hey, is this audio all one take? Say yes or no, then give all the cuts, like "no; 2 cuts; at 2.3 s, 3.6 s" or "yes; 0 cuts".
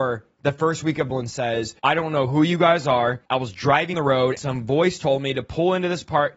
no; 5 cuts; at 1.1 s, 1.8 s, 3.3 s, 3.9 s, 4.4 s